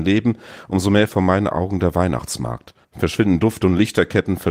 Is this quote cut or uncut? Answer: cut